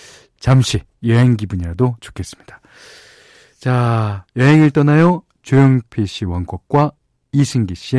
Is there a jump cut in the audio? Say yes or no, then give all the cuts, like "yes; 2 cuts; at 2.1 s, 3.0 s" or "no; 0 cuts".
yes; 1 cut; at 2.0 s